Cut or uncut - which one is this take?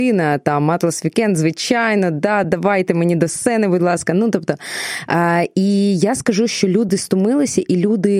uncut